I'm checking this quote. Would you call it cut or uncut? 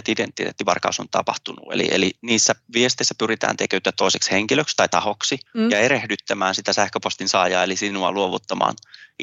cut